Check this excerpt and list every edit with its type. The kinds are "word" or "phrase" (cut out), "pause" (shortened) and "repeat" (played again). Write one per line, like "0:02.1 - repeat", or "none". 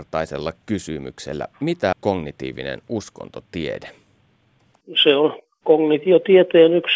0:01.9 - word